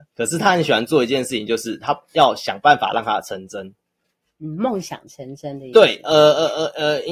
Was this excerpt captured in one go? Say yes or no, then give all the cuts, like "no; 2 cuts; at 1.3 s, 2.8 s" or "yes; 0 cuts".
yes; 0 cuts